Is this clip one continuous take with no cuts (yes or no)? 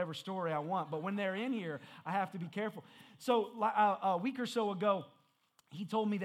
yes